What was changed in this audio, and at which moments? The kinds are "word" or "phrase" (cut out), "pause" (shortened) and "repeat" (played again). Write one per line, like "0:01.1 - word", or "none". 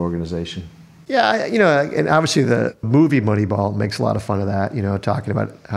0:02.8 - word